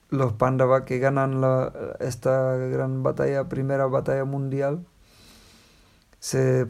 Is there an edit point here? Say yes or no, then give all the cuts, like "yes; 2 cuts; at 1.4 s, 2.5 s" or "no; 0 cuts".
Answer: no; 0 cuts